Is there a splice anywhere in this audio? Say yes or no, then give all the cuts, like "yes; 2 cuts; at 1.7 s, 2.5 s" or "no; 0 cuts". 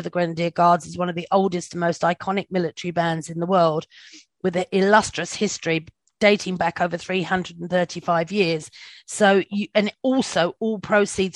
no; 0 cuts